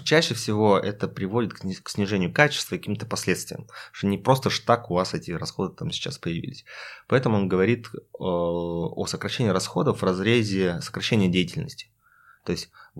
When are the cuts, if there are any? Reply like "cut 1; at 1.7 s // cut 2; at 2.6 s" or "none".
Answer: none